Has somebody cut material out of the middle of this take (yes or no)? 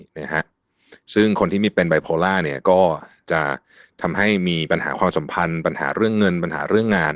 no